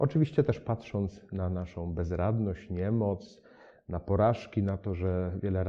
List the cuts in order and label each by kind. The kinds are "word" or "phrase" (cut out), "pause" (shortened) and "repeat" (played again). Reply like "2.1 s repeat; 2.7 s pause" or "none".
none